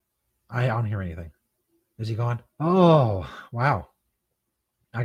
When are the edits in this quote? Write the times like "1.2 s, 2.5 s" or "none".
2.5 s

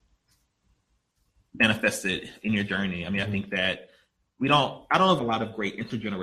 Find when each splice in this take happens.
5.2 s

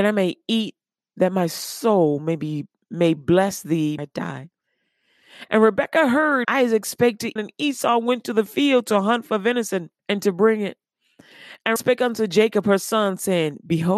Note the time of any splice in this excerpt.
4.0 s, 6.4 s, 7.4 s, 10.0 s, 11.8 s

